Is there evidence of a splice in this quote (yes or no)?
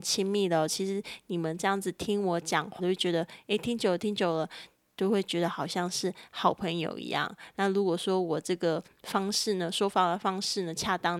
yes